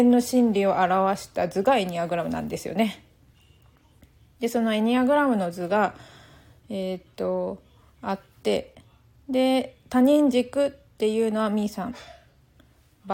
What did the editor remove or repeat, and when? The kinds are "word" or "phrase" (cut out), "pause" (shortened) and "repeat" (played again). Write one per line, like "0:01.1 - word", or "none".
none